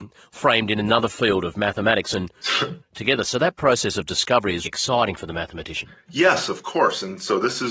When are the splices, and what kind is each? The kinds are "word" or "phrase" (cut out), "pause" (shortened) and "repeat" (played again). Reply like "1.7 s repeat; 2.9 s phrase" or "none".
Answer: 2.8 s phrase; 4.7 s word